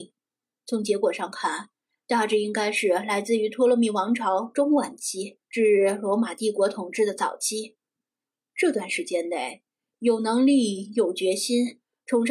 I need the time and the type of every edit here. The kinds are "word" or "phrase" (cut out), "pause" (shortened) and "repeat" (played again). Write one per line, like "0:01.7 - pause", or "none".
0:05.4 - pause

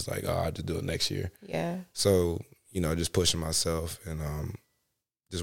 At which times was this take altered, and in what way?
0:01.4 - pause

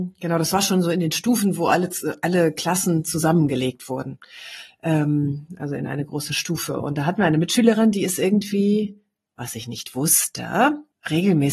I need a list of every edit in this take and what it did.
none

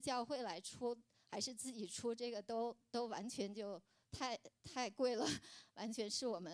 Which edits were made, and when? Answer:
none

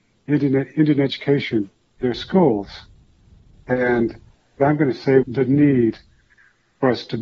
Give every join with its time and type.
0:02.0 - word
0:04.6 - word
0:05.2 - phrase

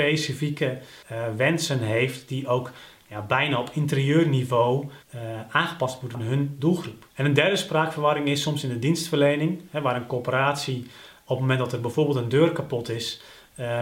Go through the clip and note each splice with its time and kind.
0:01.0 - pause
0:05.0 - pause
0:06.1 - phrase
0:07.1 - pause

